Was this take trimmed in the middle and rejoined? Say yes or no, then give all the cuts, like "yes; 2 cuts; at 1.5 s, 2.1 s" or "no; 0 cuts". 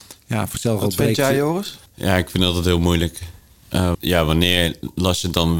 yes; 2 cuts; at 1.9 s, 3.9 s